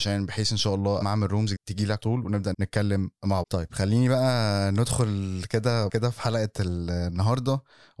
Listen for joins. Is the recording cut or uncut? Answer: cut